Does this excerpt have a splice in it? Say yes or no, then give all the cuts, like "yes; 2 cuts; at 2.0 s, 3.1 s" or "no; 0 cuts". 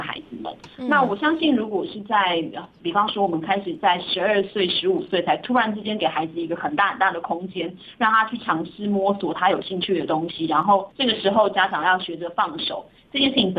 yes; 1 cut; at 10.9 s